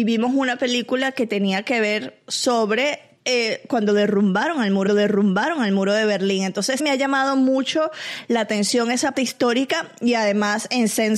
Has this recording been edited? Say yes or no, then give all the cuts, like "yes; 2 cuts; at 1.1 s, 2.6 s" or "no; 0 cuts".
yes; 4 cuts; at 3.2 s, 4.9 s, 6.8 s, 9.1 s